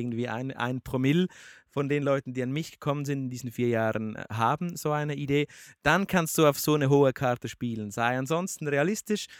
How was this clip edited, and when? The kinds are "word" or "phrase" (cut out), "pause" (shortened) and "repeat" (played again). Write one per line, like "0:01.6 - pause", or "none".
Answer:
none